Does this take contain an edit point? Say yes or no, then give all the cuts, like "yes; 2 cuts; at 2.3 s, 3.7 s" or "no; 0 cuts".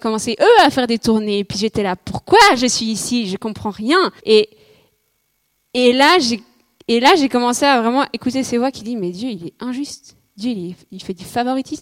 yes; 1 cut; at 4.2 s